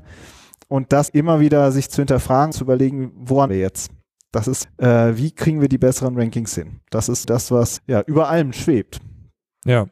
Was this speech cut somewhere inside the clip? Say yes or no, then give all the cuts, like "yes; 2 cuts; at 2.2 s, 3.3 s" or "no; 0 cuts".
yes; 6 cuts; at 1.1 s, 2.5 s, 3.5 s, 4.6 s, 7.2 s, 7.8 s